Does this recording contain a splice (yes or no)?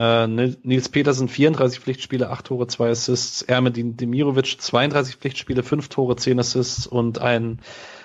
no